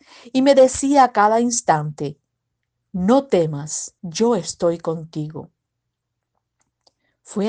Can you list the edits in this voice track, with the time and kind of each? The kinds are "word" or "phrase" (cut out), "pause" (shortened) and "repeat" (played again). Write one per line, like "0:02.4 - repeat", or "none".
0:04.0 - pause